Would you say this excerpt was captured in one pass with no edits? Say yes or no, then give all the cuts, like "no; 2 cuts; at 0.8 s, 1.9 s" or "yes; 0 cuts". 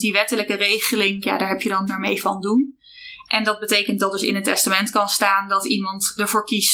no; 2 cuts; at 1.2 s, 1.9 s